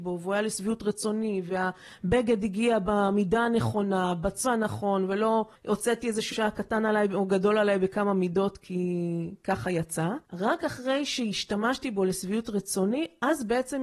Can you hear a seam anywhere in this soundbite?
yes; 4 cuts; at 4.4 s, 5.5 s, 6.3 s, 10.2 s

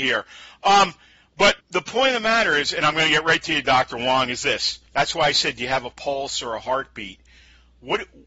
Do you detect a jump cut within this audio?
yes; 2 cuts; at 1.6 s, 4.9 s

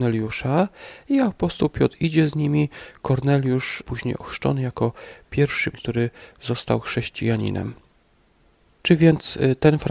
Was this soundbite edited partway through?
yes; 2 cuts; at 3.8 s, 5.7 s

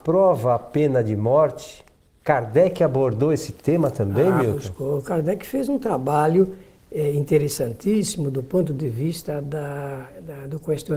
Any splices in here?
no; 0 cuts

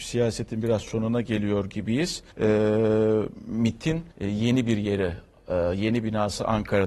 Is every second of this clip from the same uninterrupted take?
no; 2 cuts; at 2.3 s, 4.1 s

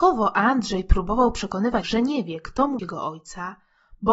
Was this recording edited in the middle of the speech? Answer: yes; 2 cuts; at 1.8 s, 2.8 s

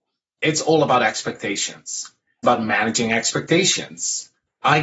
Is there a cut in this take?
yes; 1 cut; at 2.4 s

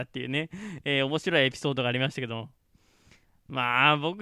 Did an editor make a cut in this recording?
no; 0 cuts

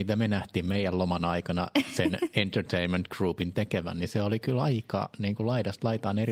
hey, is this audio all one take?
yes; 0 cuts

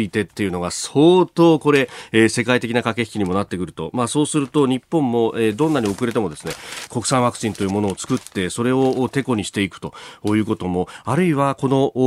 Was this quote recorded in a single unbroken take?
no; 1 cut; at 6.9 s

